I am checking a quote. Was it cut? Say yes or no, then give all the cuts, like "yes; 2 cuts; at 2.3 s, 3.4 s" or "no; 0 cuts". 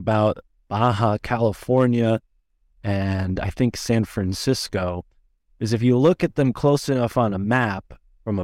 no; 0 cuts